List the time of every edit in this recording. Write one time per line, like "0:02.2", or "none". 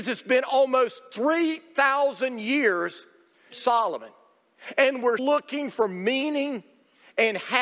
0:03.5
0:05.2